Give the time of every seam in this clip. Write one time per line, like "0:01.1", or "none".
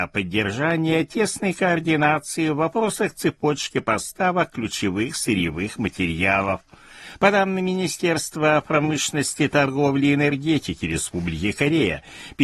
none

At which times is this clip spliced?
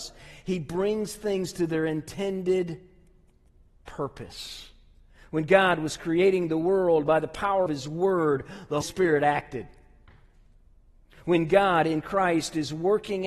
0:07.7
0:08.8

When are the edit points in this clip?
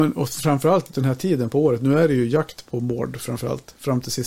0:00.9

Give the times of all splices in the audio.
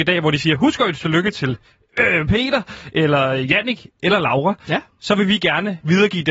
none

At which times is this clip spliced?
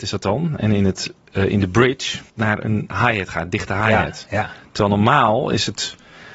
0:02.3

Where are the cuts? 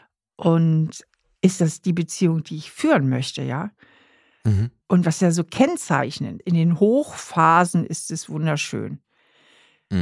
0:04.8
0:06.4

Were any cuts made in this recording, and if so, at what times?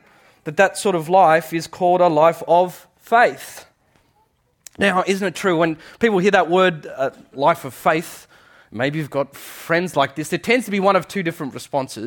none

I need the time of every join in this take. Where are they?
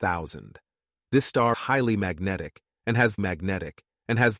0:01.5
0:03.2

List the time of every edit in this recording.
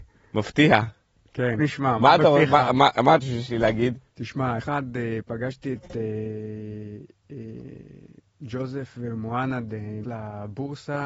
0:01.6
0:03.2
0:04.6
0:10.0

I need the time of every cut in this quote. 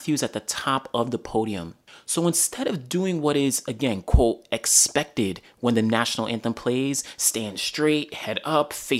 none

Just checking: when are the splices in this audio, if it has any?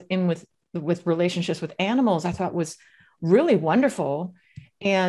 none

